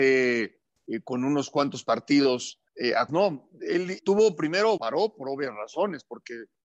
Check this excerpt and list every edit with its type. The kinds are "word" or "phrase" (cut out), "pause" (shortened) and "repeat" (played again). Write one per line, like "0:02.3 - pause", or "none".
0:02.7 - pause
0:03.1 - word
0:04.0 - word
0:04.8 - word

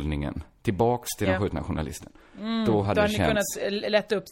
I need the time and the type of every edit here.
none

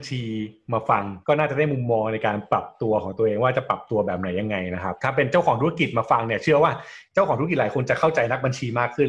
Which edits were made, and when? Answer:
0:01.2 - pause

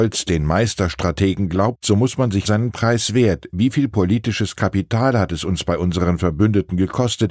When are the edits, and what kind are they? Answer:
0:02.4 - phrase

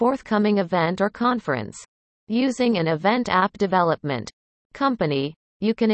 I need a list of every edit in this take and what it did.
none

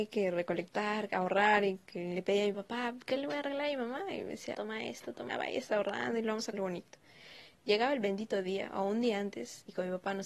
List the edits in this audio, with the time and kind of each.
0:02.5 - word
0:04.5 - phrase
0:05.3 - word
0:06.5 - word

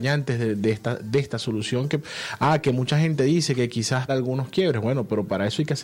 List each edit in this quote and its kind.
0:04.1 - phrase

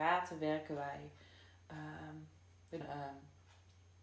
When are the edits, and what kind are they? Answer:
0:02.8 - word

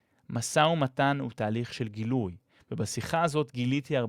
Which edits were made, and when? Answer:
none

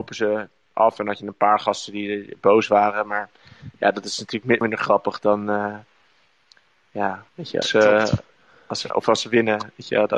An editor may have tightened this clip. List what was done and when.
0:04.6 - word
0:07.3 - pause
0:07.6 - word
0:08.9 - phrase

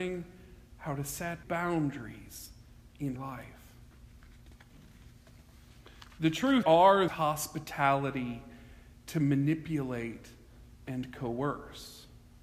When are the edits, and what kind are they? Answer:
0:01.4 - word
0:03.2 - word
0:06.6 - phrase
0:07.1 - phrase

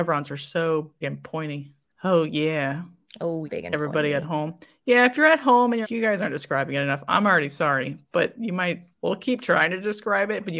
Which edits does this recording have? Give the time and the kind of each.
0:01.0 - word
0:03.5 - word
0:05.8 - word
0:08.9 - pause

